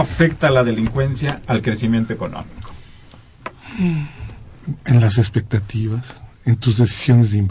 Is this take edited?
no; 0 cuts

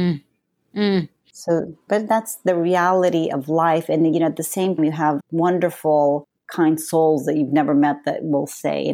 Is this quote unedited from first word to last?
no; 3 cuts; at 1.9 s, 4.8 s, 5.2 s

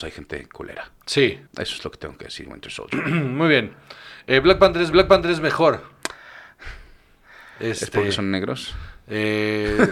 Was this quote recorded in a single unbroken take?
no; 3 cuts; at 1.5 s, 2.4 s, 4.9 s

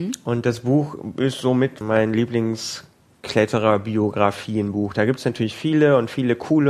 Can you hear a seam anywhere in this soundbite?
yes; 2 cuts; at 1.8 s, 3.0 s

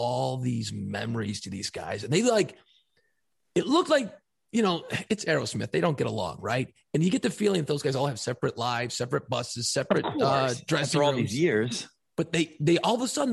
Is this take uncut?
yes; 0 cuts

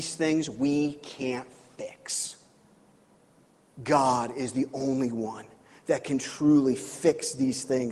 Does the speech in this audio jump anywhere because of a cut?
no; 0 cuts

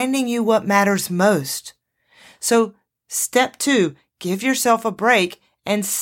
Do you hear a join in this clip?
no; 0 cuts

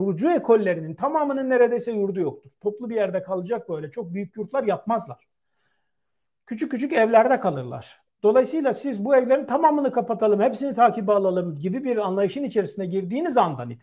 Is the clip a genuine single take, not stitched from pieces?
yes; 0 cuts

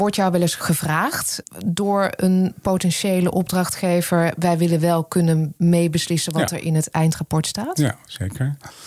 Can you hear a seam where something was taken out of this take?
no; 0 cuts

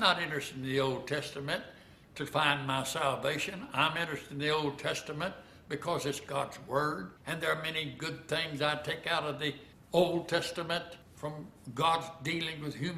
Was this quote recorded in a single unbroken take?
no; 3 cuts; at 7.2 s, 9.7 s, 11.0 s

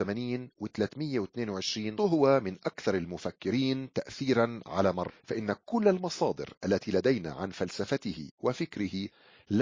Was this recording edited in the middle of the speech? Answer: yes; 2 cuts; at 2.0 s, 5.1 s

